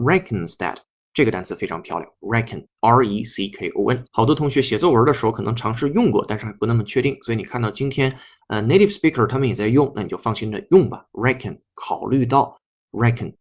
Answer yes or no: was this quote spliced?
no